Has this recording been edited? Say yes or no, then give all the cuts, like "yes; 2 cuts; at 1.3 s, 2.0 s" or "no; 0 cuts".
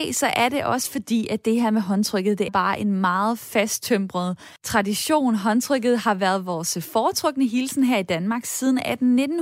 yes; 2 cuts; at 2.5 s, 4.6 s